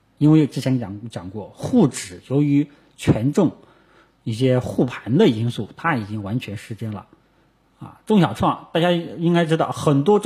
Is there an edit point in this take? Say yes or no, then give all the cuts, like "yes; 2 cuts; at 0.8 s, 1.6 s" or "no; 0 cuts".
no; 0 cuts